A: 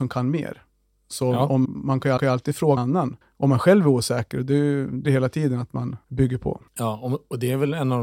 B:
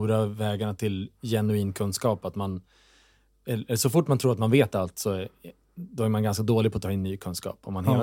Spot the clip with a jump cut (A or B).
A